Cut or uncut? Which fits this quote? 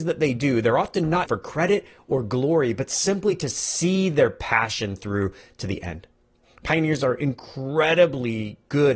cut